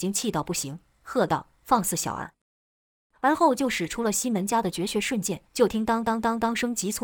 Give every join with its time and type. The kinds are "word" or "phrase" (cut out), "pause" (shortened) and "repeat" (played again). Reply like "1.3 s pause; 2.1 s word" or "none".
5.5 s pause